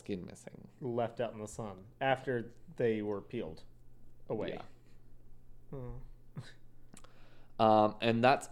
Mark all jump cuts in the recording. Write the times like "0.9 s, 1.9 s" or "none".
none